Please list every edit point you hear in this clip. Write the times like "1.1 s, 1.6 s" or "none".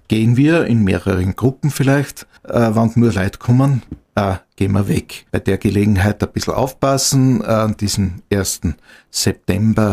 2.4 s, 5.3 s